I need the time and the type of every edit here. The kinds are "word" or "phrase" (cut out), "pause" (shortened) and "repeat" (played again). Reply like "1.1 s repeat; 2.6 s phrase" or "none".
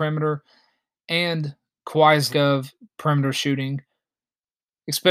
2.3 s word